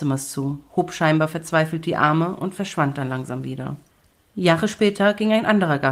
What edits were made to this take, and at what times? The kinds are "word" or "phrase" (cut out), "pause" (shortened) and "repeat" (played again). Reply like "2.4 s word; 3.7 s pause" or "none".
3.9 s pause